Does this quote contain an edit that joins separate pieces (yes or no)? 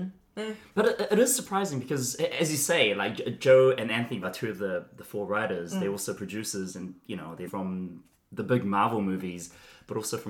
yes